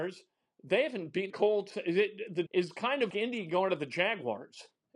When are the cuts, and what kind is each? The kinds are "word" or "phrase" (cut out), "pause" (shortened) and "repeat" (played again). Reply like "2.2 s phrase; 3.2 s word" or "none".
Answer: 1.3 s word; 2.5 s phrase; 3.1 s word